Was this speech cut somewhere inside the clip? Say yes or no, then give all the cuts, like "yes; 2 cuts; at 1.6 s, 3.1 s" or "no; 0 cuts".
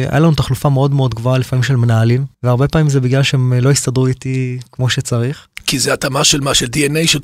yes; 1 cut; at 2.3 s